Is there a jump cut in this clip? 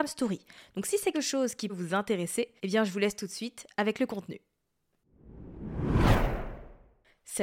yes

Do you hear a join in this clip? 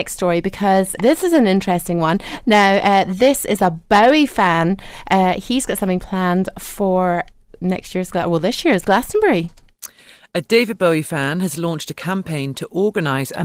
yes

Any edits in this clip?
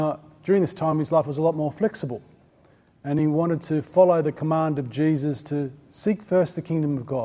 no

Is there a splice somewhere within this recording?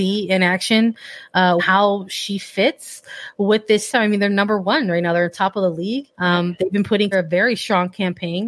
yes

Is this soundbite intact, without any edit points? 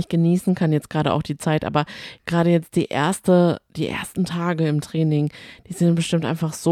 no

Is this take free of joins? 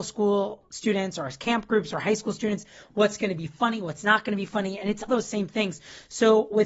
no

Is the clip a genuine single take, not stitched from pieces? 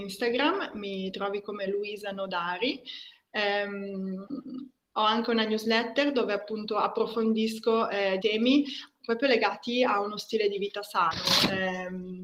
no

